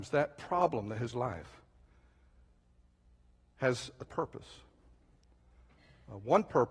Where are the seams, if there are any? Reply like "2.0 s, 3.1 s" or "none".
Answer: 1.1 s, 4.1 s